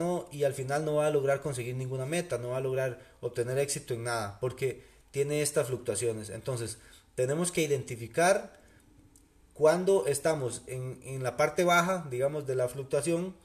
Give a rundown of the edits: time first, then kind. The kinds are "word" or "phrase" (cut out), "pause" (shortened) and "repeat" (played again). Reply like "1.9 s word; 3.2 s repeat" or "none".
none